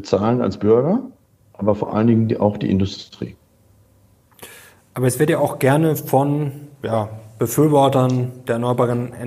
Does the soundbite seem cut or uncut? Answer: uncut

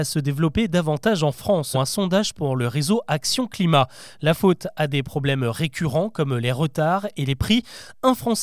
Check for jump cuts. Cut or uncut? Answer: cut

